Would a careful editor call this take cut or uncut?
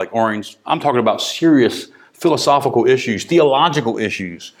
uncut